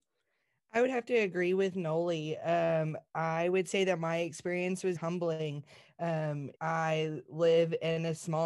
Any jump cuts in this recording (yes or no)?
yes